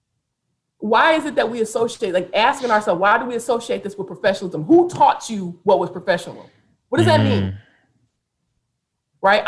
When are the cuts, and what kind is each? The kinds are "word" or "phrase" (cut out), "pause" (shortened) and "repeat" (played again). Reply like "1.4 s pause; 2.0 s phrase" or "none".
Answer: none

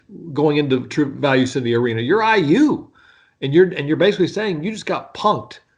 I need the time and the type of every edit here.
none

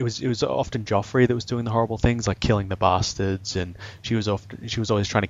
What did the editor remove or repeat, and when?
none

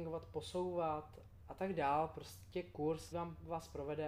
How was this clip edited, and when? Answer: 3.1 s word

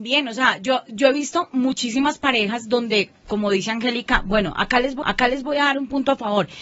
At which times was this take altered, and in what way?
5.0 s repeat

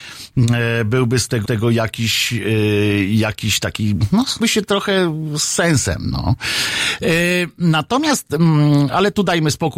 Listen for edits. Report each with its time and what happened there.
1.4 s repeat; 4.4 s word

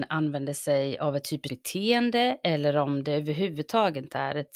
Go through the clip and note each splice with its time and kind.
1.5 s word

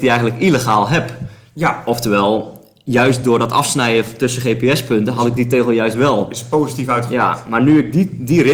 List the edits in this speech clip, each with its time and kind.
none

